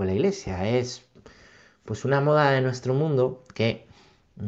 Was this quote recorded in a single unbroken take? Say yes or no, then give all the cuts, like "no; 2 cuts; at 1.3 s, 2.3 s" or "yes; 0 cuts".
yes; 0 cuts